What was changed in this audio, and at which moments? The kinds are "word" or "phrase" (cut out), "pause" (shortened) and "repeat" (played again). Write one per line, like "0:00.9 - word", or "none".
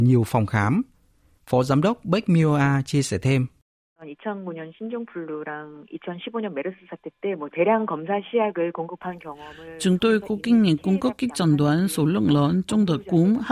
none